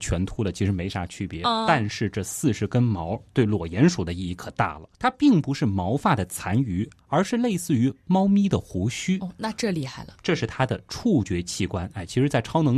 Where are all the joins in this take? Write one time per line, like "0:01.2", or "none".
0:04.9